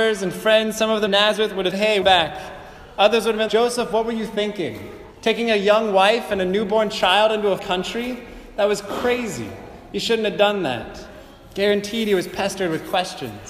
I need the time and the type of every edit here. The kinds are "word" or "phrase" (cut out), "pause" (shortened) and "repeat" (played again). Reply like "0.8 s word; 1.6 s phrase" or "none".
1.1 s word; 1.7 s word; 2.0 s word; 3.5 s word; 5.1 s pause; 7.6 s word